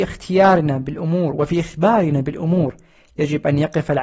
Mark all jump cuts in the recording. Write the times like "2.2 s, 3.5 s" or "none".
none